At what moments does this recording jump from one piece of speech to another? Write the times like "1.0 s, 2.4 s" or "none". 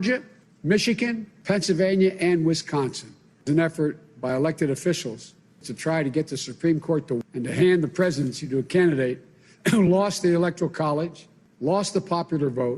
none